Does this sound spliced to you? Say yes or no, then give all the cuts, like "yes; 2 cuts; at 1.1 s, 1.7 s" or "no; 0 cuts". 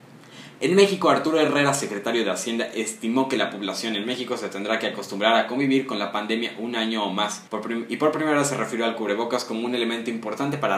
yes; 1 cut; at 7.5 s